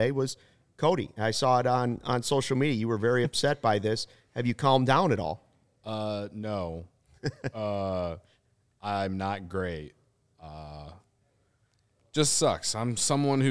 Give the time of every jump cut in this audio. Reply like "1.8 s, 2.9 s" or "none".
none